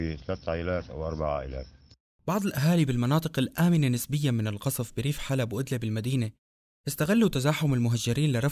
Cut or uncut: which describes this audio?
uncut